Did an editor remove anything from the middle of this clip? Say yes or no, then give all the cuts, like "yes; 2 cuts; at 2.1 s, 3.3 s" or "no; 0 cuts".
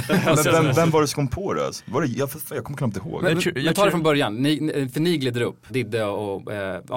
yes; 1 cut; at 5.7 s